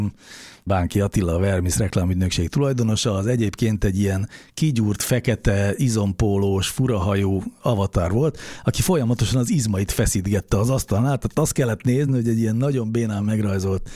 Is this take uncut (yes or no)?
yes